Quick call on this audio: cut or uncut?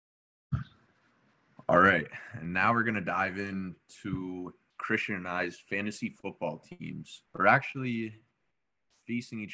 cut